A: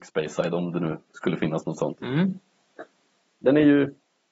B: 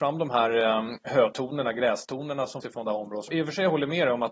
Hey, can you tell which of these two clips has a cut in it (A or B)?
B